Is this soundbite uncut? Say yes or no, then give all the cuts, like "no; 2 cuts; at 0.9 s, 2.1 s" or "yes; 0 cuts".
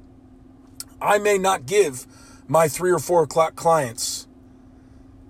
yes; 0 cuts